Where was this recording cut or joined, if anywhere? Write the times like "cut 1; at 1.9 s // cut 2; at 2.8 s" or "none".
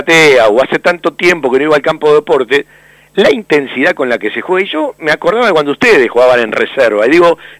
none